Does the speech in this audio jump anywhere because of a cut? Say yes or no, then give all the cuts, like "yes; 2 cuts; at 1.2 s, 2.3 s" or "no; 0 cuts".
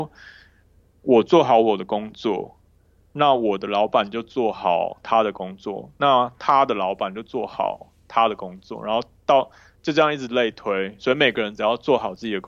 no; 0 cuts